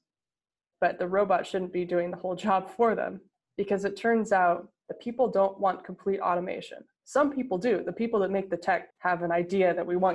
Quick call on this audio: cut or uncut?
cut